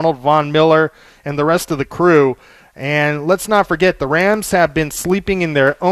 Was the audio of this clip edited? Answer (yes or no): no